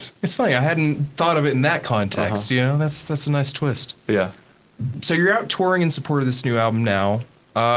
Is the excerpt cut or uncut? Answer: uncut